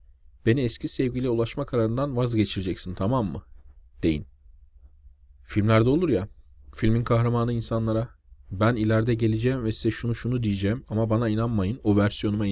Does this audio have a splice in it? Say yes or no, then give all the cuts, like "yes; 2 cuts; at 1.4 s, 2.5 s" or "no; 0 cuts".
no; 0 cuts